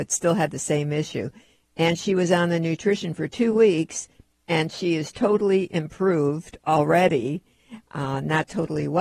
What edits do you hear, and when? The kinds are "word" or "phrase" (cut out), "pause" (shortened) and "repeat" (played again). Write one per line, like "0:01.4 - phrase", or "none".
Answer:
none